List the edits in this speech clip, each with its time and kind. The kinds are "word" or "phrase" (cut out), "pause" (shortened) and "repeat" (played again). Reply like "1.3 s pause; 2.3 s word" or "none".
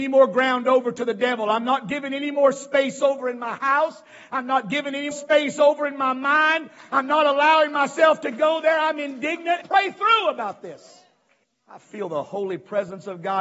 5.1 s word; 9.6 s phrase; 11.4 s pause